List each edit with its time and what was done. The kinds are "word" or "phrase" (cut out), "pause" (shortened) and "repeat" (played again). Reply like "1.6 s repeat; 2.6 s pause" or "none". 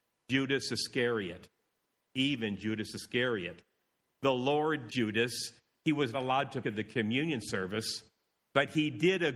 4.9 s word; 6.1 s word; 6.6 s word